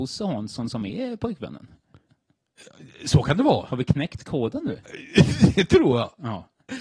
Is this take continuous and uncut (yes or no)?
yes